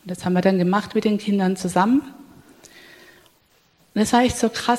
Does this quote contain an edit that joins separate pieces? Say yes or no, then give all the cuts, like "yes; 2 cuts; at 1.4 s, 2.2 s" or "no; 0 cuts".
no; 0 cuts